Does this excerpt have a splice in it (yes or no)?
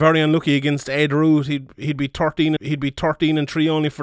yes